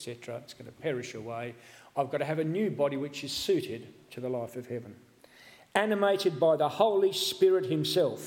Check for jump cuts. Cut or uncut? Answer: uncut